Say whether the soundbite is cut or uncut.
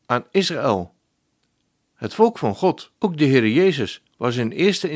cut